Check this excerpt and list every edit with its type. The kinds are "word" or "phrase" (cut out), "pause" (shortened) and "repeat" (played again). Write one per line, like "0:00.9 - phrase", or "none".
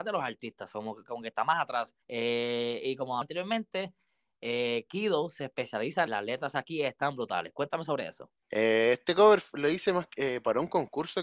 0:02.0 - pause
0:03.2 - word
0:06.1 - phrase
0:08.4 - pause

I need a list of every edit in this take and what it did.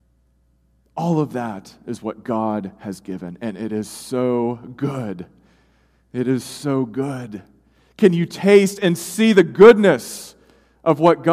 none

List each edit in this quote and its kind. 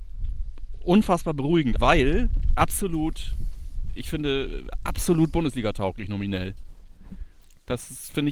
0:01.8 - word

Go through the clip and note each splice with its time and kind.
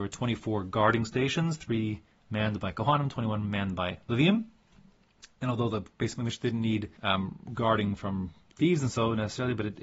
0:06.9 - pause

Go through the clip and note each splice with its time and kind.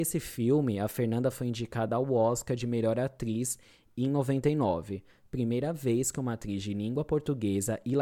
none

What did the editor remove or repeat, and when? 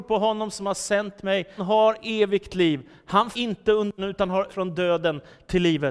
0:01.6 - word
0:03.3 - word
0:04.0 - word
0:04.5 - word

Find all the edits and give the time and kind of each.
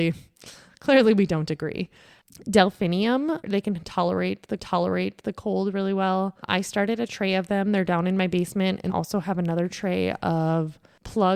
0:04.6 - repeat
0:08.9 - phrase

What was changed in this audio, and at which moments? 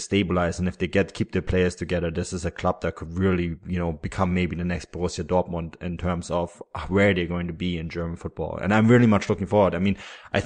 none

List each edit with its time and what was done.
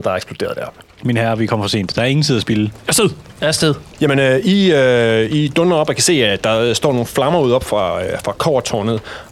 0:03.9 - pause

